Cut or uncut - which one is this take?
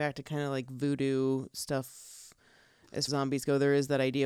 cut